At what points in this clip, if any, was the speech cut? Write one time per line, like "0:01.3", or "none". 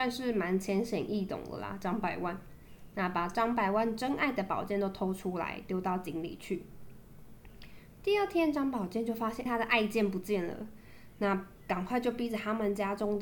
0:09.5